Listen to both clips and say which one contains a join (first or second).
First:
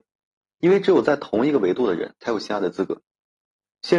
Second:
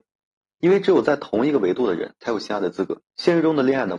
second